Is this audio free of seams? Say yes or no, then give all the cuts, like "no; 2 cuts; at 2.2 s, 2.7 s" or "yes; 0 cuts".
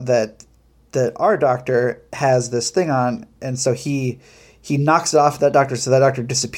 yes; 0 cuts